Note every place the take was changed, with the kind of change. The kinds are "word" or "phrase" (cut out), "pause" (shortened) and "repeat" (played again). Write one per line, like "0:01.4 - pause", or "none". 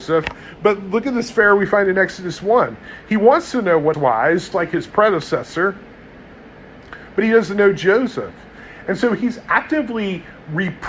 0:03.9 - word
0:04.5 - word